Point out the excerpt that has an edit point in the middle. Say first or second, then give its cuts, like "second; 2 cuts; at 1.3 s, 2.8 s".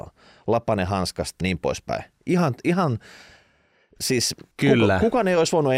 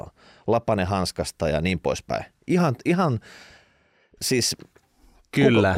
first; 2 cuts; at 1.4 s, 4.5 s